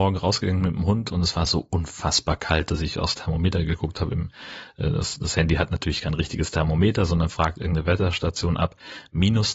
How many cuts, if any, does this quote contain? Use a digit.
0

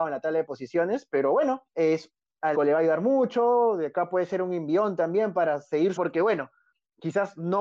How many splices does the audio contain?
3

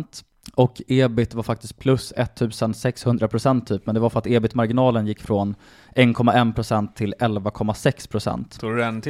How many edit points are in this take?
0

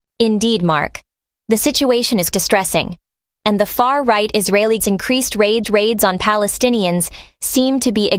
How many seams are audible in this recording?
3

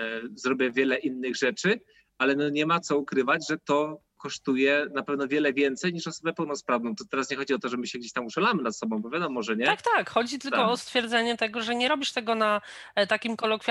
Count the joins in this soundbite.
0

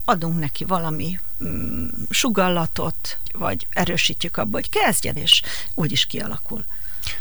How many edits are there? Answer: 2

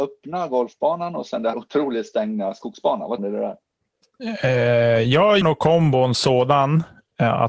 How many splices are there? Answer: 4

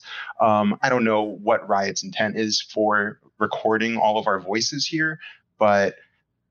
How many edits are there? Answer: 1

